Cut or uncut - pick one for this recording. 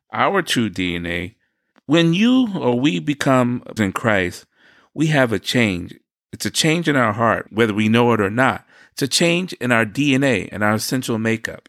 cut